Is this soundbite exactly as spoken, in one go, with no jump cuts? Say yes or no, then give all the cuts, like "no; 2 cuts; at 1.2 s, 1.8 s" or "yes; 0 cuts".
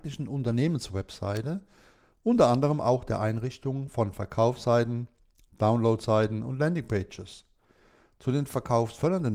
yes; 0 cuts